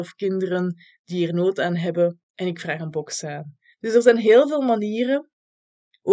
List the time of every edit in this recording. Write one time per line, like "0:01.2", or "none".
0:02.2
0:03.7